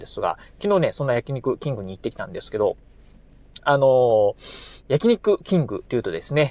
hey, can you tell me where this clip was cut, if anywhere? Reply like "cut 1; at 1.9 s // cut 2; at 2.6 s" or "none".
cut 1; at 3.6 s // cut 2; at 4.8 s